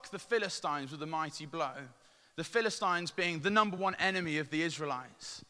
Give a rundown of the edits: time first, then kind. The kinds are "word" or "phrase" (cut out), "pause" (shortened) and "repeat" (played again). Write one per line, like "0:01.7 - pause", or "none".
none

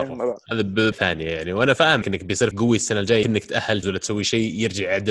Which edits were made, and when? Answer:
0:00.9 - word
0:02.0 - word
0:02.5 - word
0:03.2 - word
0:03.8 - word

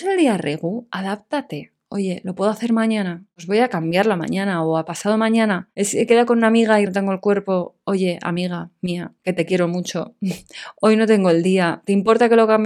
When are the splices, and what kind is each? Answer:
0:06.9 - word
0:09.2 - pause

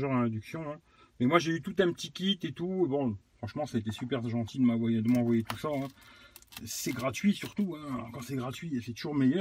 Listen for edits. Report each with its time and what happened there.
none

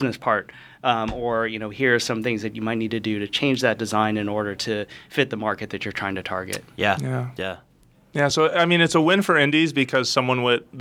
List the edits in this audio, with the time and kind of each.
none

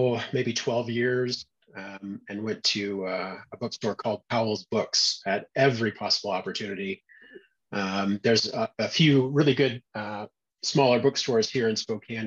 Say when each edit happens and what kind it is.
none

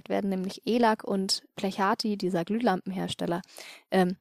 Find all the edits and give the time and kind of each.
none

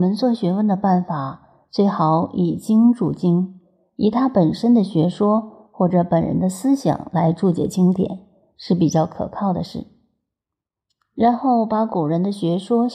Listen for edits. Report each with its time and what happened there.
none

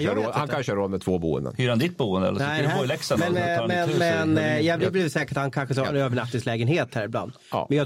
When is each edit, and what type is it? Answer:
none

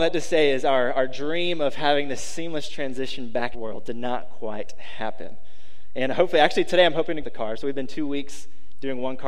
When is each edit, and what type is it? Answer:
0:03.5 - phrase
0:07.2 - phrase

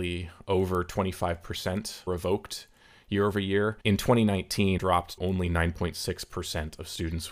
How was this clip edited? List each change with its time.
0:02.1 - phrase
0:03.8 - pause
0:04.8 - word
0:05.2 - word

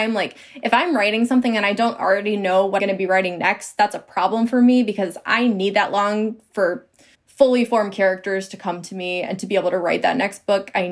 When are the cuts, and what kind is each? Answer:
0:02.8 - word
0:07.1 - pause
0:09.3 - word

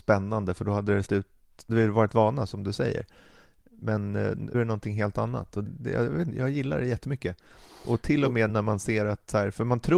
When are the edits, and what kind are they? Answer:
0:01.0 - word
0:01.7 - word
0:04.5 - word
0:05.6 - word
0:06.3 - word
0:08.5 - word

